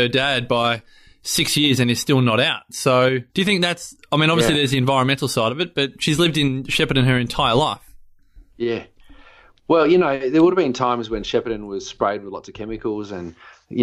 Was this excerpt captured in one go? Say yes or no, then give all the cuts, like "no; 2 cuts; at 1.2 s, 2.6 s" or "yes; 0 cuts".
no; 2 cuts; at 3.3 s, 8.5 s